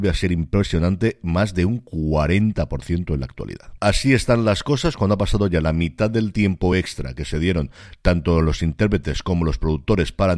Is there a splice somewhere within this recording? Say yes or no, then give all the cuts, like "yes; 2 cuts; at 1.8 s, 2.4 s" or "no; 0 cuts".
no; 0 cuts